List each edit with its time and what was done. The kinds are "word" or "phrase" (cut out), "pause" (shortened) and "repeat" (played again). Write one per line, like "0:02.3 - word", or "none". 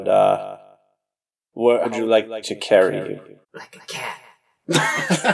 0:01.8 - word
0:02.4 - word
0:03.4 - pause